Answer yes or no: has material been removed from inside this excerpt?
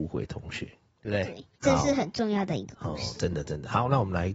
yes